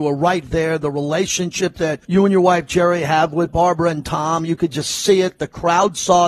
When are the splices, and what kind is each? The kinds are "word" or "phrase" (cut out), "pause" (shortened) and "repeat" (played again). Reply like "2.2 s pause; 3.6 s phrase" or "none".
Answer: 2.0 s pause